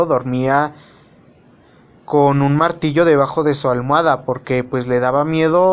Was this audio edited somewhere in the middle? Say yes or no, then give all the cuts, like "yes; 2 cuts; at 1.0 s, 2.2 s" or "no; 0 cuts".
no; 0 cuts